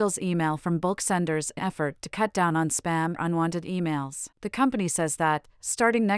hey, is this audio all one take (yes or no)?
no